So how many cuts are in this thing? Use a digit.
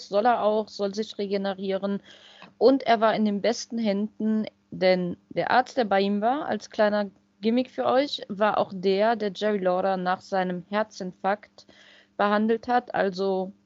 0